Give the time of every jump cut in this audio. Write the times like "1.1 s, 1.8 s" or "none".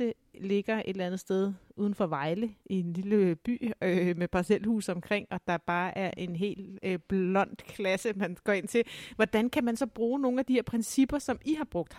2.6 s